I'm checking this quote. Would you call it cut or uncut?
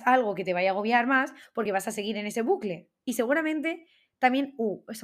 uncut